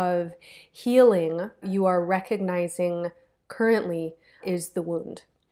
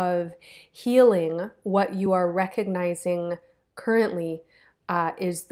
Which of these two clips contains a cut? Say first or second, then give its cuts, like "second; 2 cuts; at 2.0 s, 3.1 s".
first; 2 cuts; at 1.6 s, 4.4 s